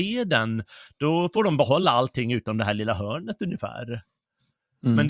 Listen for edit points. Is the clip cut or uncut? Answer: uncut